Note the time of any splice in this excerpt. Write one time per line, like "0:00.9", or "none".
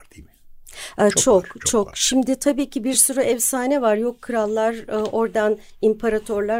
none